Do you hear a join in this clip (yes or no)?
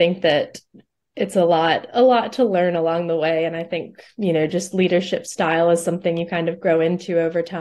no